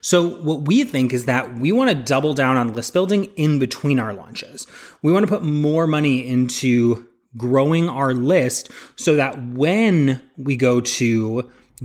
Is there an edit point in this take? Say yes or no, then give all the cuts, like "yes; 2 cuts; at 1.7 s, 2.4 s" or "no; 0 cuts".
no; 0 cuts